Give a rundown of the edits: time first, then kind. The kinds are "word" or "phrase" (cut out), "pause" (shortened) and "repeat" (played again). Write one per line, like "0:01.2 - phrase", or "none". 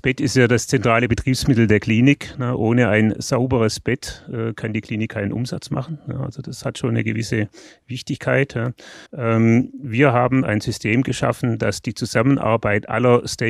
0:09.1 - pause